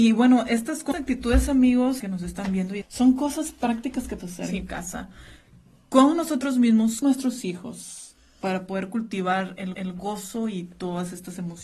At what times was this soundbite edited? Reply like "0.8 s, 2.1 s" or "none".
0.9 s, 2.0 s, 2.8 s, 4.2 s, 7.0 s, 9.7 s